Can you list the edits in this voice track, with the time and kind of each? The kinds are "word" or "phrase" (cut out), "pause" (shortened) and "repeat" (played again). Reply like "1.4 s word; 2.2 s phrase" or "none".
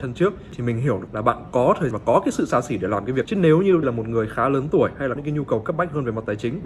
1.1 s word; 1.9 s word; 3.2 s word; 3.8 s word; 5.2 s word

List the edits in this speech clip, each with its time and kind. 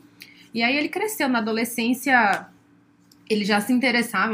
none

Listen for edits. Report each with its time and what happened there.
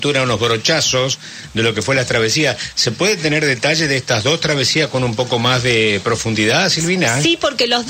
none

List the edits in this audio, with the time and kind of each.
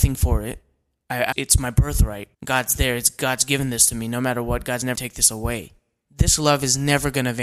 1.3 s word; 2.3 s pause; 5.0 s word

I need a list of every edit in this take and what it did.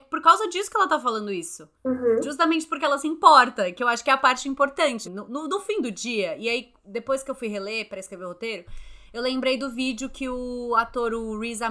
1.7 s pause; 5.0 s word

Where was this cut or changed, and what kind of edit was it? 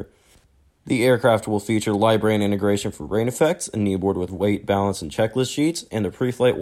4.3 s word

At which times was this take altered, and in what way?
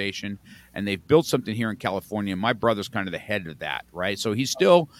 none

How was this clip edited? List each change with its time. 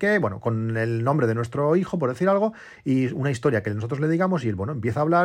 none

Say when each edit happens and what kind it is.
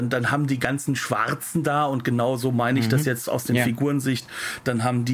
none

